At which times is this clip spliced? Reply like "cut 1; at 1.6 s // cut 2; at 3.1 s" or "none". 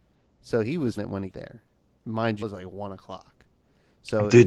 cut 1; at 1.0 s // cut 2; at 1.3 s // cut 3; at 2.4 s